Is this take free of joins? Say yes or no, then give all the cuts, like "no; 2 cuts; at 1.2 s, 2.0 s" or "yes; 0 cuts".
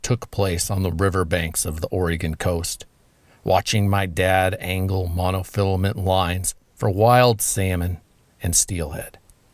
yes; 0 cuts